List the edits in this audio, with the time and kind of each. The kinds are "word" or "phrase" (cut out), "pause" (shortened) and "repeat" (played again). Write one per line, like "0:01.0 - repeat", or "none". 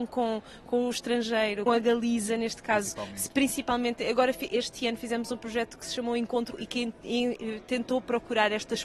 0:01.7 - word
0:06.5 - word